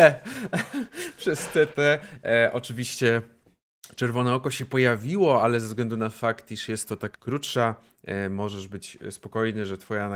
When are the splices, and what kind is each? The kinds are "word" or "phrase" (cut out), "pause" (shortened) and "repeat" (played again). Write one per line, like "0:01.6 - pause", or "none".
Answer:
0:07.1 - word